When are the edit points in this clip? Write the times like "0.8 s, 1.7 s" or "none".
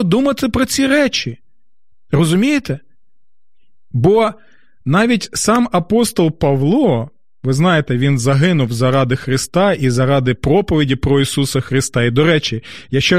none